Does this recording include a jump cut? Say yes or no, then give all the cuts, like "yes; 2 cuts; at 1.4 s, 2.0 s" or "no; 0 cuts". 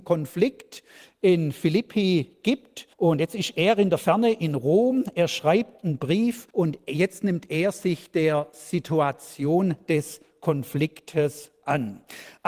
yes; 2 cuts; at 2.9 s, 6.5 s